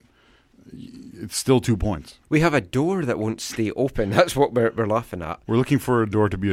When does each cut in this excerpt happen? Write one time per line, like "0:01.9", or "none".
0:02.2